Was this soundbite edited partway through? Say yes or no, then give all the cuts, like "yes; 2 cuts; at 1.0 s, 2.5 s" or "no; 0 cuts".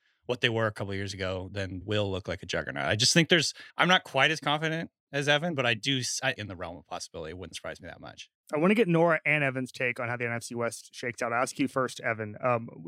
yes; 4 cuts; at 1.8 s, 3.7 s, 6.3 s, 8.4 s